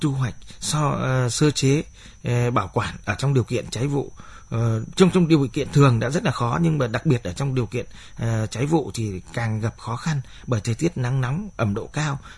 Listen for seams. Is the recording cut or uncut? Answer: uncut